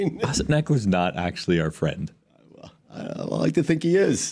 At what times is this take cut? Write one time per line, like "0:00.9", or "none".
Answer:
none